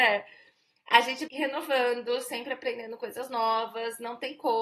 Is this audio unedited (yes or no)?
no